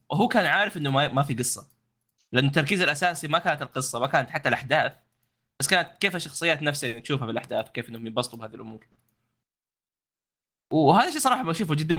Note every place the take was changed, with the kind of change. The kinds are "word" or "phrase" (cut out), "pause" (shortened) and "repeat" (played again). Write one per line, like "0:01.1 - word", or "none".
none